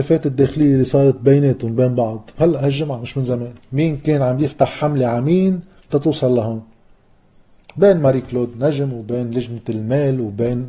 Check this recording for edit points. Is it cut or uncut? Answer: uncut